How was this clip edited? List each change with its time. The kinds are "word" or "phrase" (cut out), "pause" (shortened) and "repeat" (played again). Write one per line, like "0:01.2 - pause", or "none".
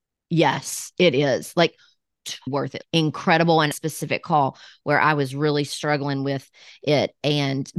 0:02.5 - word
0:02.8 - word
0:03.7 - phrase

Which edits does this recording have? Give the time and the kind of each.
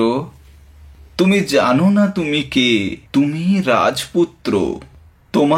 0:03.1 - pause

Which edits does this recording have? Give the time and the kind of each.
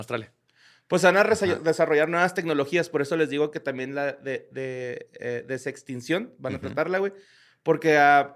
none

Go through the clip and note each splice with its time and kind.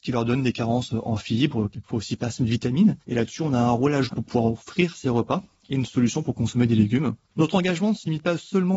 0:03.0 - pause
0:04.1 - word
0:07.2 - pause

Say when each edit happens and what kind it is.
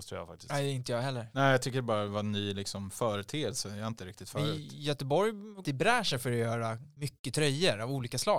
0:04.0 - word
0:05.6 - phrase

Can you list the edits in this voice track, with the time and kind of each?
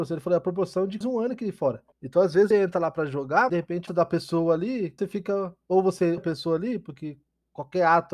0:01.0 - word
0:01.9 - pause
0:02.5 - word
0:03.5 - word
0:03.9 - phrase
0:05.0 - word
0:06.2 - word

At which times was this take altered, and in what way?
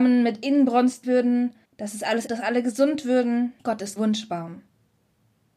0:01.0 - word
0:01.7 - pause
0:02.3 - word
0:03.6 - pause
0:04.0 - word

